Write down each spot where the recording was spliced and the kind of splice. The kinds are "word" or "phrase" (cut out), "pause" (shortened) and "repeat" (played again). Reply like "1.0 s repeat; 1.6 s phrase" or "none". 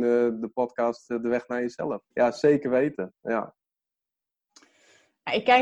2.1 s pause